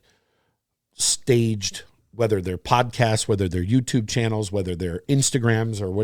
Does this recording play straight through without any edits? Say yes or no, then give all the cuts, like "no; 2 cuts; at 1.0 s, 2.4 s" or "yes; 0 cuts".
yes; 0 cuts